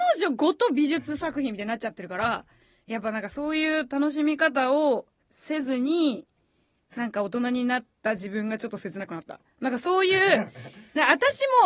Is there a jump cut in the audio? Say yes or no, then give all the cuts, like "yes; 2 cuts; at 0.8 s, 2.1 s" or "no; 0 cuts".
no; 0 cuts